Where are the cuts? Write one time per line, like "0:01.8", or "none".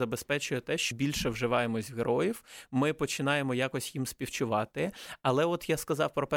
0:00.9